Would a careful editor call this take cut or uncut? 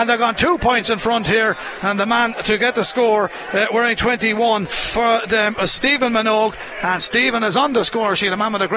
uncut